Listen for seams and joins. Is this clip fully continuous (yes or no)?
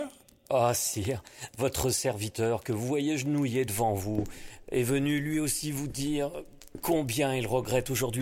yes